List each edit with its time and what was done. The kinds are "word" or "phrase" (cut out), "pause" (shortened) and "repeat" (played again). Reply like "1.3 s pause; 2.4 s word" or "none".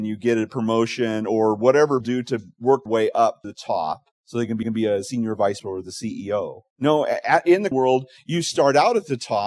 2.0 s word; 2.9 s word; 3.4 s word; 4.1 s pause; 4.6 s repeat; 5.6 s word; 6.7 s pause; 7.7 s word